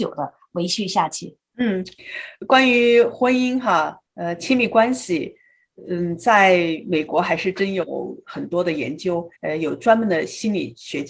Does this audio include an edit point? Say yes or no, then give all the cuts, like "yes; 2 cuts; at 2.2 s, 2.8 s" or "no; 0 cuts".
yes; 3 cuts; at 1.5 s, 4.1 s, 9.4 s